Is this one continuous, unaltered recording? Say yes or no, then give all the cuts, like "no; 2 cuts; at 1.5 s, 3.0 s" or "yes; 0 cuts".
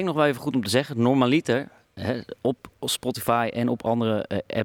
yes; 0 cuts